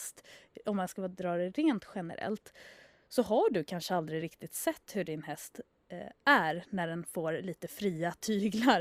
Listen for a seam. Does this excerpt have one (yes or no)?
no